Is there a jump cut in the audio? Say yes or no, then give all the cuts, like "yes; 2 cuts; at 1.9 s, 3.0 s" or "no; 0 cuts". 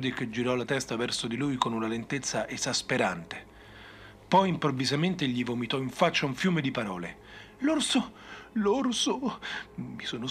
no; 0 cuts